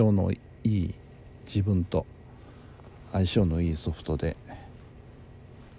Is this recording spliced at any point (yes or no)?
no